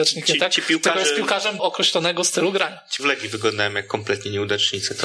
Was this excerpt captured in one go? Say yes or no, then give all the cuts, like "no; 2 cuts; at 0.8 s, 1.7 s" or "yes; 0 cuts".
no; 2 cuts; at 1.6 s, 3.0 s